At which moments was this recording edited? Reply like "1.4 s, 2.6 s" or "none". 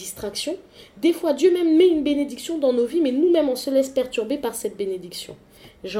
none